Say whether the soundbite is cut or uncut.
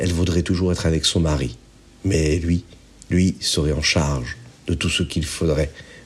uncut